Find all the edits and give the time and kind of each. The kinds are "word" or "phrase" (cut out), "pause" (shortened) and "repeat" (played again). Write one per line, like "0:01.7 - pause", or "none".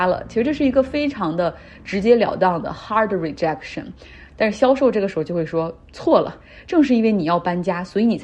0:05.8 - pause